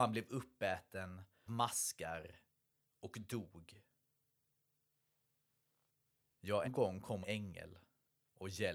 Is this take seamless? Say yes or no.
no